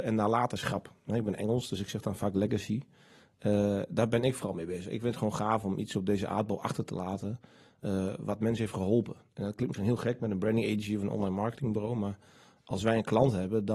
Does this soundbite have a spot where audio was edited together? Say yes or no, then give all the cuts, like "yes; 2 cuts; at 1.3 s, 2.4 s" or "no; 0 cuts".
no; 0 cuts